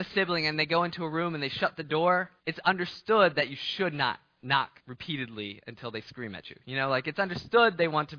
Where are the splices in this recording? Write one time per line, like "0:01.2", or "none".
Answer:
0:02.4
0:04.8